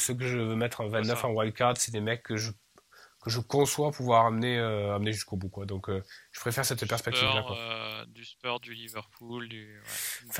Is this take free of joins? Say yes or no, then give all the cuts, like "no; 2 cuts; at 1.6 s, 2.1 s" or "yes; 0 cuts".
yes; 0 cuts